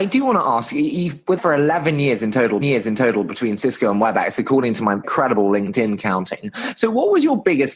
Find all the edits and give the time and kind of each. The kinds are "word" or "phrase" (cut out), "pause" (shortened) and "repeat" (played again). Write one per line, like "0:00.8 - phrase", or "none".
0:01.4 - word
0:02.6 - repeat
0:05.0 - word